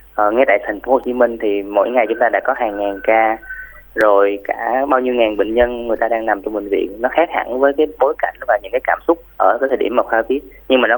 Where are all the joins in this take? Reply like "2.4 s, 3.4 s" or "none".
9.3 s